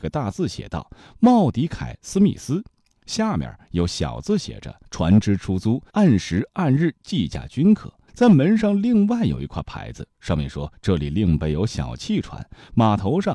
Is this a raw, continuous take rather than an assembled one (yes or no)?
no